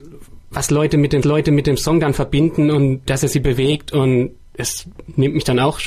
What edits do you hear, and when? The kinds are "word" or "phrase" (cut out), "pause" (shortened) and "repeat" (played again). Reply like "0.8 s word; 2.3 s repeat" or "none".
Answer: 1.2 s repeat